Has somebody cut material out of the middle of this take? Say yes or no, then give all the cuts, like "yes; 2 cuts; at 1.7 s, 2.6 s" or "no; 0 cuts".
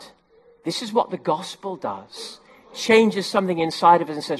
no; 0 cuts